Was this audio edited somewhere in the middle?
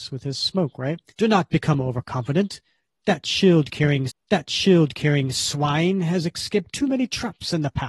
yes; 2 cuts; at 1.1 s, 4.1 s

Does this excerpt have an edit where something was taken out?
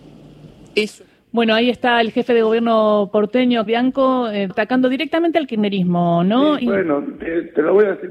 yes; 3 cuts; at 3.7 s, 4.5 s, 6.6 s

